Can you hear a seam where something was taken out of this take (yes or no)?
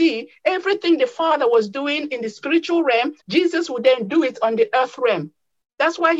yes